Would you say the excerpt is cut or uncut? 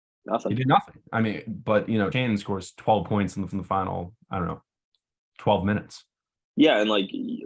cut